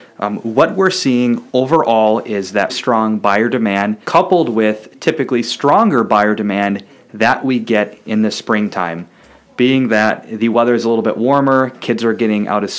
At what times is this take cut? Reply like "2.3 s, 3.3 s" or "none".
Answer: 1.5 s, 2.7 s, 4.0 s